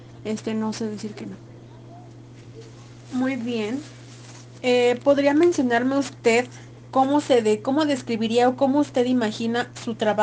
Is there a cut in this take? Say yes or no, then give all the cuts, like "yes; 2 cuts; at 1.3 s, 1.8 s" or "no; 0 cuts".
no; 0 cuts